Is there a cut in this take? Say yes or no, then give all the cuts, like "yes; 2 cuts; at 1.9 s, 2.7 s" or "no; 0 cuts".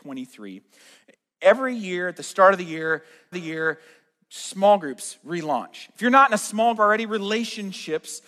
yes; 2 cuts; at 3.3 s, 6.8 s